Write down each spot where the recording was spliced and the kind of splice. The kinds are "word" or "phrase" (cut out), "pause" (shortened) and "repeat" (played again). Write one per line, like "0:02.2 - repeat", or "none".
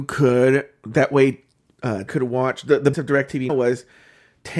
0:02.1 - word
0:02.9 - word
0:03.5 - word